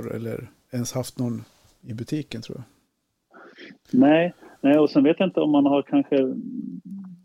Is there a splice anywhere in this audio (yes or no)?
no